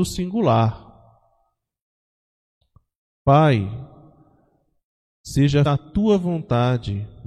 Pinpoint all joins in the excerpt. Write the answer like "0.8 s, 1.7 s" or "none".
5.7 s